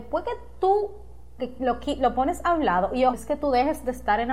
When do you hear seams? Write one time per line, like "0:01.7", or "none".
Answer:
0:01.4
0:03.1

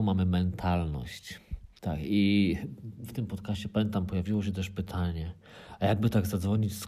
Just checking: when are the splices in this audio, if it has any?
0:01.8

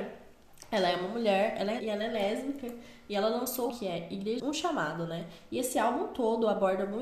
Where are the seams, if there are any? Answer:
0:01.8
0:03.7
0:04.4

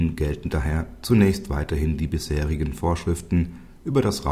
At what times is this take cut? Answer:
none

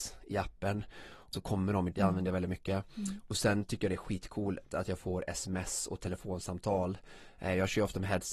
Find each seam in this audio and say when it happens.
0:01.3
0:01.9

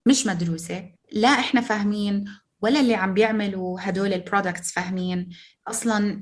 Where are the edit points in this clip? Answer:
0:01.0

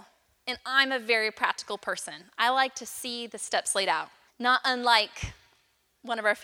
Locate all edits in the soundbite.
0:04.3

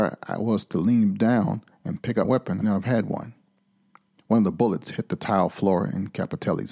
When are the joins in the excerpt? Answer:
0:02.2
0:02.6

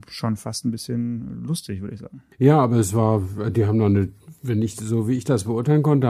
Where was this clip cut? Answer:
0:02.3

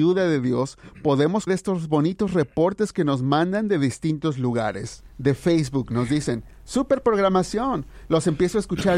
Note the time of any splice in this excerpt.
0:01.5

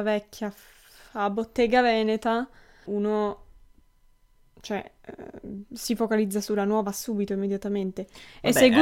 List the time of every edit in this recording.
0:02.9

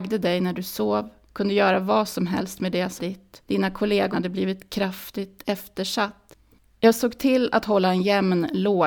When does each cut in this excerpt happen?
0:03.0
0:03.4
0:04.1
0:06.6

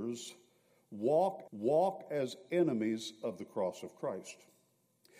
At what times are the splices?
0:01.5

